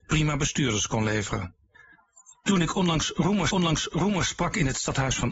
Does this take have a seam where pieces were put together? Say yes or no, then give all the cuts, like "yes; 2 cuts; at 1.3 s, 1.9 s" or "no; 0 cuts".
yes; 1 cut; at 3.5 s